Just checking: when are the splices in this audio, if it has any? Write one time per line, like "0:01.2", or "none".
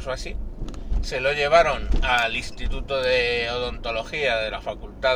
none